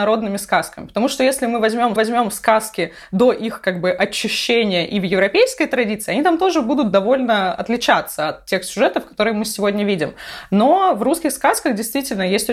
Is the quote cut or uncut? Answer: cut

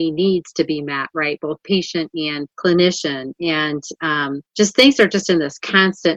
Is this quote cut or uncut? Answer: cut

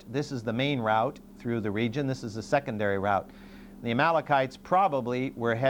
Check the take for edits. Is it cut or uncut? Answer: uncut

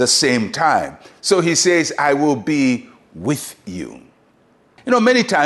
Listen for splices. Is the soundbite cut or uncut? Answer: uncut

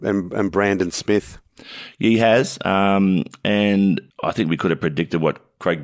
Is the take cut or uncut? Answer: cut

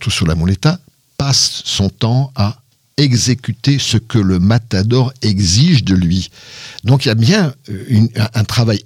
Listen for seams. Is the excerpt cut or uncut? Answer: uncut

